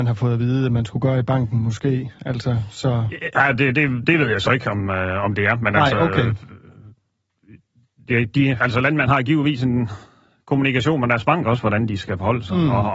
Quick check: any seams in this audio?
no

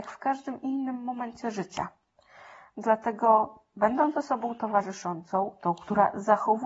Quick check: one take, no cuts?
yes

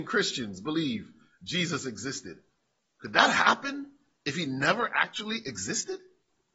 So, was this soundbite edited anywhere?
no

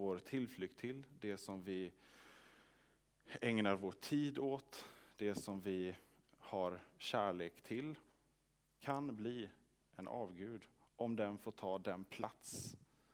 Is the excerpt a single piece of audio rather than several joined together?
yes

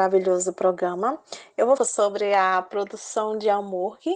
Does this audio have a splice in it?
yes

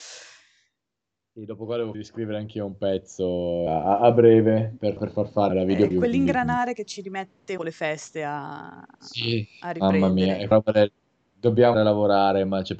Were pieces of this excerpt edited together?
yes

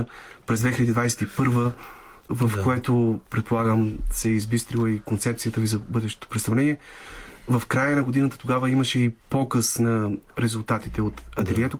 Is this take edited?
yes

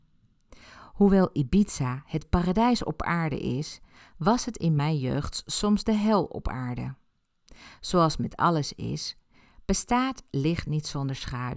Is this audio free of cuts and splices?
yes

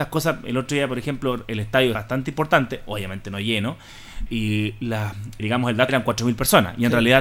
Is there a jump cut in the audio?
yes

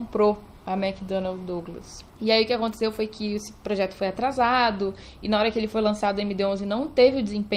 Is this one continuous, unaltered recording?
no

